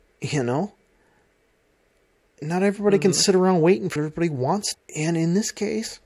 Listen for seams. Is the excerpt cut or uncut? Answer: cut